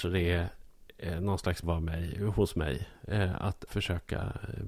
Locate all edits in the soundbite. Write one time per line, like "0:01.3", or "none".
0:01.6
0:03.7